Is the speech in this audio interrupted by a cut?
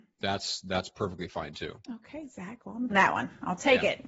yes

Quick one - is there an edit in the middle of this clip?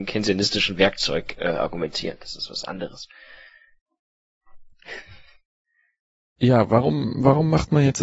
no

